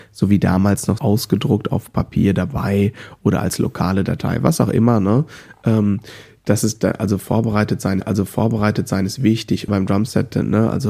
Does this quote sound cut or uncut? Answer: cut